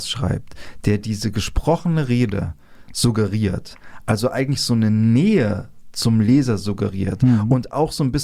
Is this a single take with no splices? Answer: yes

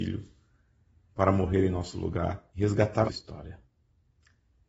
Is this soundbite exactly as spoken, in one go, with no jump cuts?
no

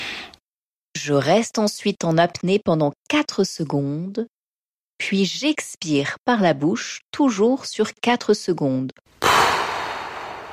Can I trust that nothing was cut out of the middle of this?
yes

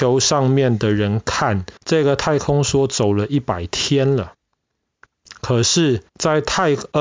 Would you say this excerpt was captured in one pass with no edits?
no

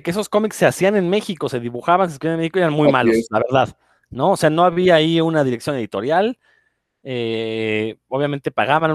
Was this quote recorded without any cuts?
yes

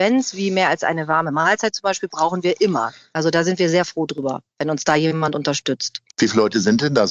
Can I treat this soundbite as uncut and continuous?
no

